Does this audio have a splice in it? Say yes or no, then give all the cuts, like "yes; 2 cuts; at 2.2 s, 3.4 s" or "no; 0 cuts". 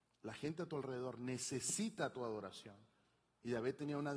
no; 0 cuts